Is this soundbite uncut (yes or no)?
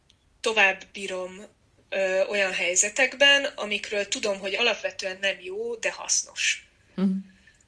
yes